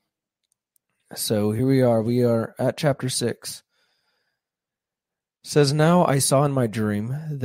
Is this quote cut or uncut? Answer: uncut